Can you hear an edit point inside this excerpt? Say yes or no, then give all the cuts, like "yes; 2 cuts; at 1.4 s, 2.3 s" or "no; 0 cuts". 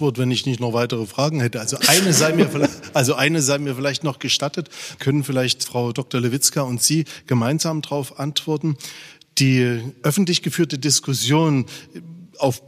no; 0 cuts